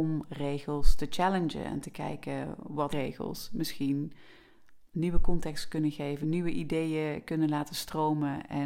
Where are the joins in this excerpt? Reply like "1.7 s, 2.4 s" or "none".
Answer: 2.9 s, 4.9 s, 6.2 s